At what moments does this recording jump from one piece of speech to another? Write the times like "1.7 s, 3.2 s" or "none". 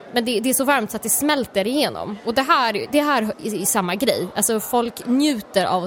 none